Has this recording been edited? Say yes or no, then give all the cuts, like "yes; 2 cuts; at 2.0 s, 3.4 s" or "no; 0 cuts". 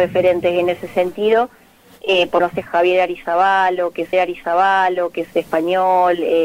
yes; 2 cuts; at 2.4 s, 4.1 s